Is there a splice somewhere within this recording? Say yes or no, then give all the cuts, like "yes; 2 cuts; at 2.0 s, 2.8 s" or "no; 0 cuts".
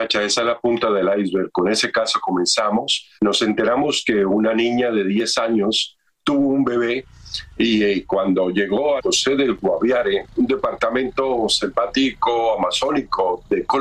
yes; 2 cuts; at 3.2 s, 9.0 s